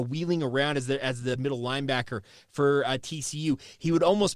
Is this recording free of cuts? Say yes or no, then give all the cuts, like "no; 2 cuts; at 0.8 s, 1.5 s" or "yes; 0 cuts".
no; 1 cut; at 1.4 s